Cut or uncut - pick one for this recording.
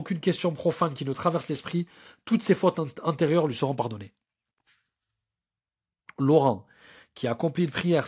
uncut